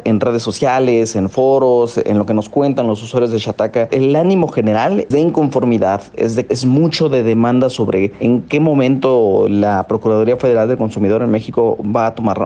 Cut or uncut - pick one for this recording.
cut